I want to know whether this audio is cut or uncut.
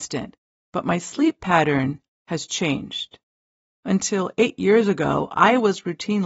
uncut